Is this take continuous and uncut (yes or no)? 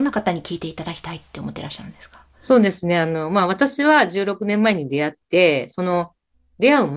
yes